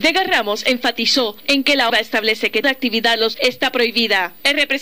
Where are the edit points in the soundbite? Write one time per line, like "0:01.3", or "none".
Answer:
0:01.9
0:02.6
0:03.3